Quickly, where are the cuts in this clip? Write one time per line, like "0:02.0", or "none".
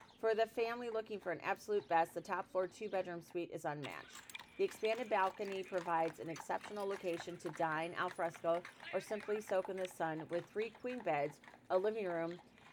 none